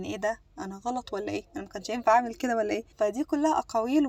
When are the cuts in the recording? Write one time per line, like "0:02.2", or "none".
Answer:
0:02.9